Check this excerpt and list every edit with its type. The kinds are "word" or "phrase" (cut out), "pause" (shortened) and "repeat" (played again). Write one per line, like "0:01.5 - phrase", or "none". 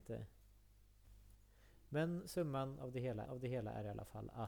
0:03.3 - repeat